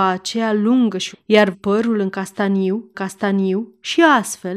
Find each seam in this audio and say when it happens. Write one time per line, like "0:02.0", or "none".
0:01.1
0:01.5
0:02.9